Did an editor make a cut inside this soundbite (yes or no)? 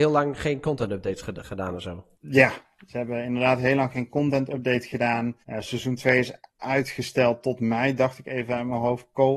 yes